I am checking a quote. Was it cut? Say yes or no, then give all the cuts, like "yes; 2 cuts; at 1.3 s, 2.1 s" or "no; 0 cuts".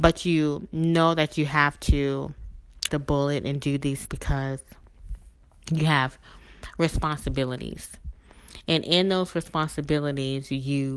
yes; 2 cuts; at 2.9 s, 4.1 s